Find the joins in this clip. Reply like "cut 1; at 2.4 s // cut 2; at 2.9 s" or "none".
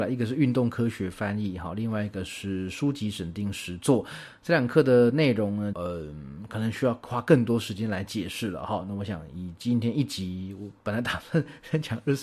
cut 1; at 5.7 s

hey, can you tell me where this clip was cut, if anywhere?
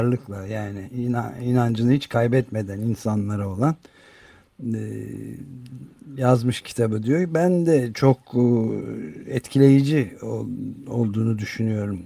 none

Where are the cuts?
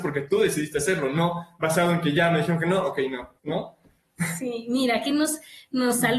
cut 1; at 3.4 s

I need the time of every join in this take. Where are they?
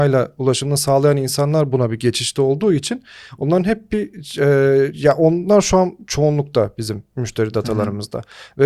cut 1; at 4.9 s

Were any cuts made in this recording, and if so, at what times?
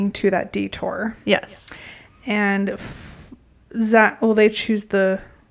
none

